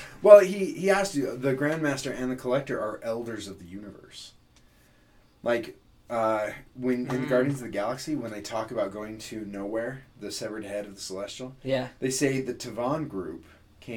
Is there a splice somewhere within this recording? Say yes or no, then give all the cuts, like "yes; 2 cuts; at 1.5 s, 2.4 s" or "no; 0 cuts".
no; 0 cuts